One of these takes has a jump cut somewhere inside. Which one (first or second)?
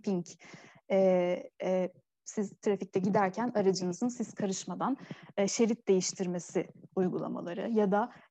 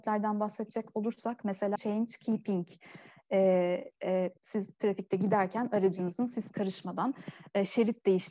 second